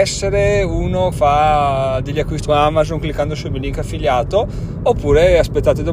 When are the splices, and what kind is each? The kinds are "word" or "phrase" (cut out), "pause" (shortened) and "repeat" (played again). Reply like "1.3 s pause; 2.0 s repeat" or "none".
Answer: 1.1 s word; 2.4 s word